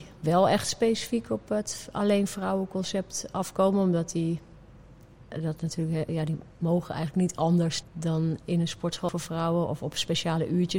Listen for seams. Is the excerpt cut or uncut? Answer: cut